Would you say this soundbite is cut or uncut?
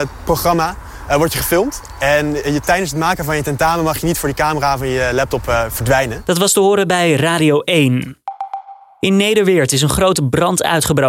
uncut